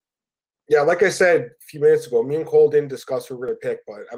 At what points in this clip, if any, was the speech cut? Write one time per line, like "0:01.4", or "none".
none

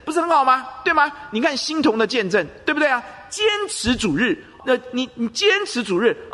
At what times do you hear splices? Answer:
0:04.6

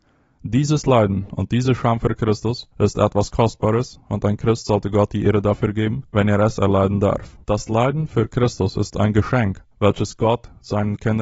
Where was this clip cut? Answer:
0:02.7
0:06.1
0:07.4
0:09.7

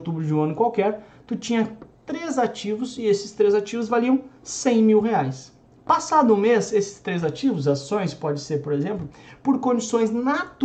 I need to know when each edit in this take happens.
0:05.6

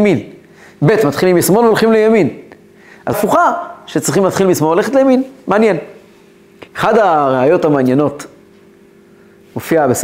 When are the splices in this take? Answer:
0:03.1
0:06.7

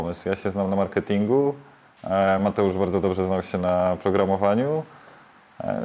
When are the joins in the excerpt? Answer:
none

